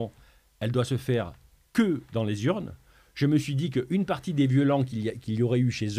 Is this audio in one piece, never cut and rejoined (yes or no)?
yes